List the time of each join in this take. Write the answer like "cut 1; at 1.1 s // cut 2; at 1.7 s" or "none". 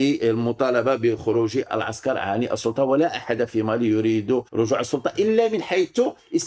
cut 1; at 4.5 s